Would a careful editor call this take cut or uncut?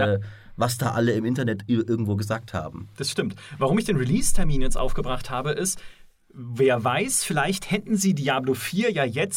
uncut